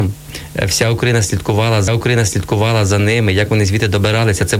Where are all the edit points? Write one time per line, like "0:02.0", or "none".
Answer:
0:01.9